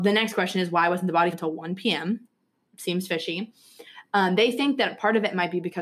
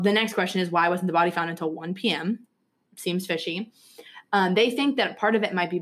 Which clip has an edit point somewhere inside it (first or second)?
first